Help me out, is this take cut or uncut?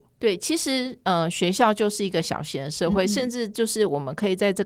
uncut